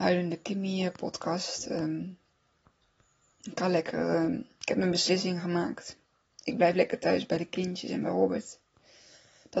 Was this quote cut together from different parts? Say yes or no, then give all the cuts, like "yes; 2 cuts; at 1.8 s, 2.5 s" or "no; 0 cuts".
no; 0 cuts